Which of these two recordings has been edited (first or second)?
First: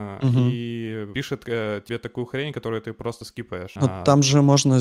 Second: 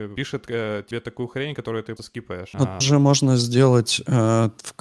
second